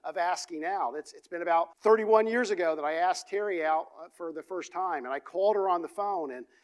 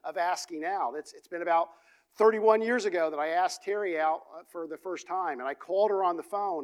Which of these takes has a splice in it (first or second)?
first